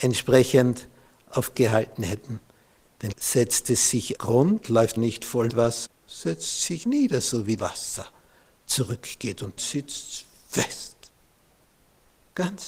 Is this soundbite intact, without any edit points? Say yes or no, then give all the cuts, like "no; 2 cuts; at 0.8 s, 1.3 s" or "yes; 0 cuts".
no; 9 cuts; at 1.5 s, 3.1 s, 4.2 s, 5.0 s, 5.5 s, 5.9 s, 6.8 s, 7.6 s, 9.6 s